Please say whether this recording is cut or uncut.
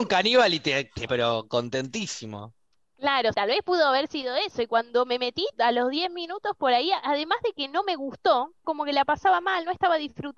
cut